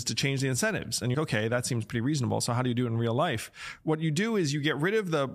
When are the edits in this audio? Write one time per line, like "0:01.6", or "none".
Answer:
0:01.1